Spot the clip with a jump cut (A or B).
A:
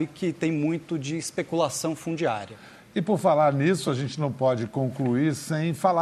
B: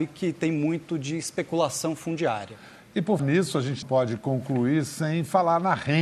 B